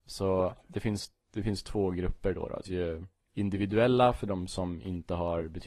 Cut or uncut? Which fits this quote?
cut